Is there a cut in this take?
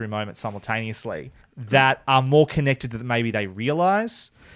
yes; 1 cut; at 1.4 s

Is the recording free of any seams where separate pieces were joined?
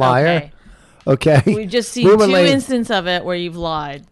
yes; 0 cuts

